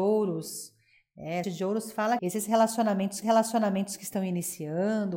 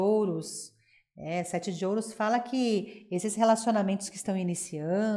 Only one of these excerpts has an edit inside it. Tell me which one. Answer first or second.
first